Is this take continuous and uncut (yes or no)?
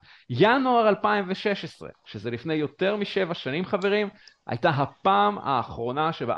yes